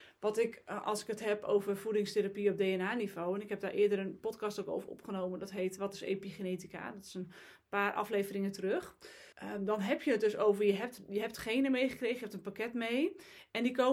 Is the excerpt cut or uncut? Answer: cut